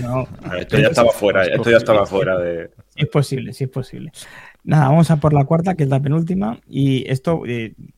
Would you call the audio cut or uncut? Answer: uncut